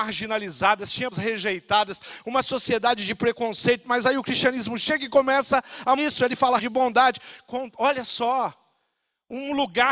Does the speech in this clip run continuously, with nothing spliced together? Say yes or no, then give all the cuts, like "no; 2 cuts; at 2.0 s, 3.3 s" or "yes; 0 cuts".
no; 3 cuts; at 1.1 s, 6.0 s, 6.6 s